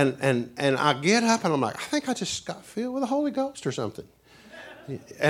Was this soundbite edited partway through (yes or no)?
no